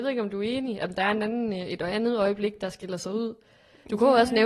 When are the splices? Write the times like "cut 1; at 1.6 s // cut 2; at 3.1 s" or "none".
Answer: none